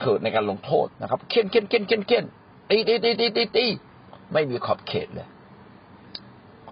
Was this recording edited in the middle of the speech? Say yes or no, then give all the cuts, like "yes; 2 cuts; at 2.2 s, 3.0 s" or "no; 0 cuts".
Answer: yes; 1 cut; at 0.9 s